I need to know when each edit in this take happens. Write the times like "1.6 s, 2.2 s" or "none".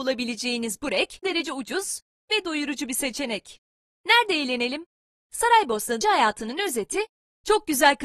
1.2 s, 6.0 s